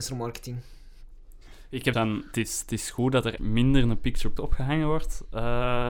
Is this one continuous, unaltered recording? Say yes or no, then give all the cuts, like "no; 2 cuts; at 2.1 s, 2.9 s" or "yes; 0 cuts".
no; 3 cuts; at 1.9 s, 3.4 s, 4.4 s